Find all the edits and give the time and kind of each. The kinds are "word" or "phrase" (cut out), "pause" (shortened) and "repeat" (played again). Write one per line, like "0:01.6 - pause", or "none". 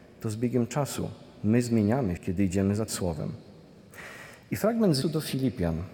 0:02.2 - word
0:02.9 - word
0:05.0 - word

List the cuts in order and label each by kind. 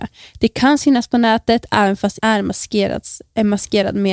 0:02.2 - word

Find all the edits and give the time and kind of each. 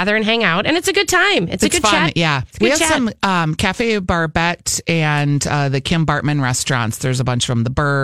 0:02.5 - pause

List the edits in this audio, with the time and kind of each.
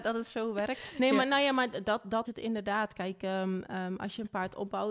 0:02.2 - word

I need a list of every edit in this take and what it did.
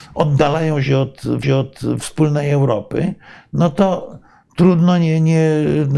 0:01.4 - repeat

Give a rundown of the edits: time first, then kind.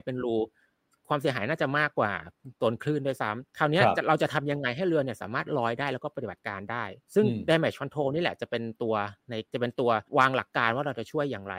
0:03.5 - pause
0:07.0 - pause
0:09.5 - pause
0:10.1 - pause

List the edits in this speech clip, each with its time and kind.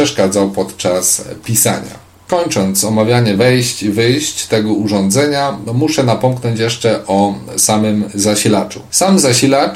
none

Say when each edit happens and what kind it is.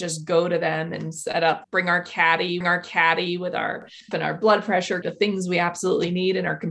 0:01.6 - word
0:02.6 - repeat
0:04.1 - word
0:05.0 - phrase

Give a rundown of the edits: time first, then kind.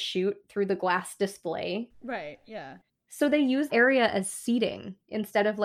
0:02.9 - pause
0:03.7 - word

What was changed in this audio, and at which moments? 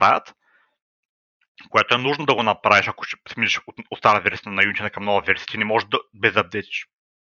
none

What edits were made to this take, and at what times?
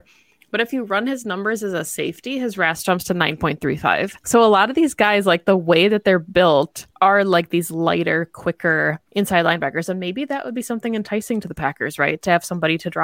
0:04.2 - pause
0:06.9 - pause
0:09.1 - pause

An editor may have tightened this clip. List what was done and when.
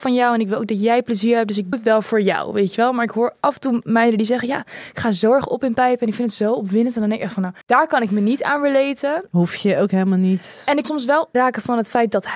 0:01.7 - word
0:07.6 - pause
0:10.8 - word
0:11.3 - word

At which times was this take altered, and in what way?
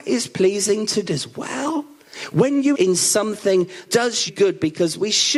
0:01.1 - word
0:02.7 - word
0:03.9 - word
0:04.3 - word

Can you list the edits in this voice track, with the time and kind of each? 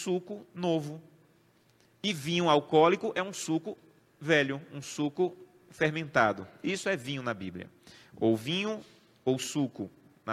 none

